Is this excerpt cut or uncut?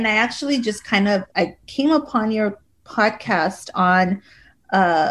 cut